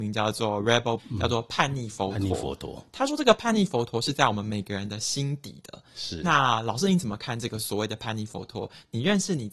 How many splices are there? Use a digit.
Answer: 1